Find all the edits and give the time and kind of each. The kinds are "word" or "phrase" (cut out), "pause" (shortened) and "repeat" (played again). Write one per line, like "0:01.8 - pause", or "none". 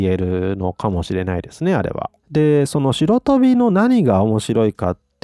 0:02.2 - pause